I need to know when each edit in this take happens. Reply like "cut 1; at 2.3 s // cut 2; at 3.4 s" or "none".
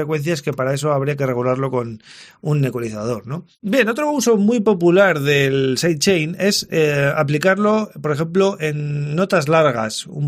none